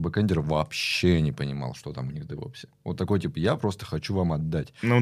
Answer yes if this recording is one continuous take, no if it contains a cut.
yes